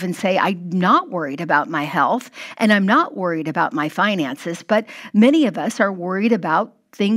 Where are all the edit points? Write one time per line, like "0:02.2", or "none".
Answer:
none